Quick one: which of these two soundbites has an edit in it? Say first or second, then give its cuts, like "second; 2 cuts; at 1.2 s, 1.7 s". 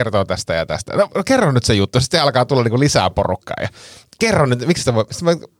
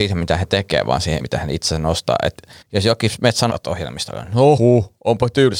second; 4 cuts; at 1.2 s, 2.6 s, 3.5 s, 4.6 s